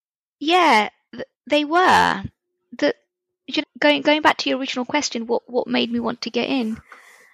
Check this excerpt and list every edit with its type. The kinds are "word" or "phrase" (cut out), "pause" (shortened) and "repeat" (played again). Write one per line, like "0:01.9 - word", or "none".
0:01.3 - word
0:03.6 - word